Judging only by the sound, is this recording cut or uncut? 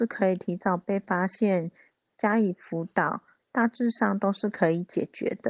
uncut